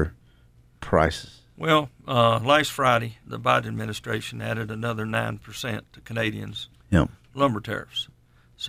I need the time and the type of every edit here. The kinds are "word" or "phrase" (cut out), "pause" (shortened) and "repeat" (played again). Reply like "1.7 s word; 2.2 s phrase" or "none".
3.2 s pause